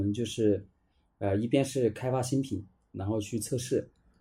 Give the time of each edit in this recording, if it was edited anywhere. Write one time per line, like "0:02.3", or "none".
none